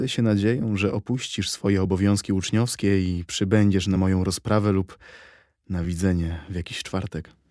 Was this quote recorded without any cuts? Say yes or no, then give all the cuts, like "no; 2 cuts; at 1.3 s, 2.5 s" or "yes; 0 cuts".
yes; 0 cuts